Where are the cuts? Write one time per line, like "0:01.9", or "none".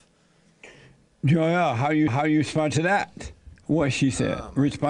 0:02.1